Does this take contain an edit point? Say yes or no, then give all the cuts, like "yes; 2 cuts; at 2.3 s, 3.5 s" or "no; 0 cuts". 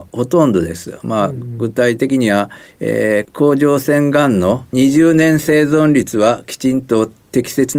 yes; 1 cut; at 4.7 s